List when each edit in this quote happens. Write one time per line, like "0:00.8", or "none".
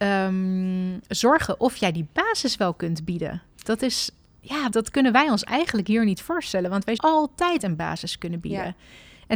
0:01.0
0:04.7
0:07.0